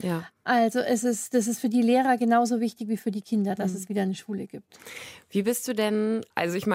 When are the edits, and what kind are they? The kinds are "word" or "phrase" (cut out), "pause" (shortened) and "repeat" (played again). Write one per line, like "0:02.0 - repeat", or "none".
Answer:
none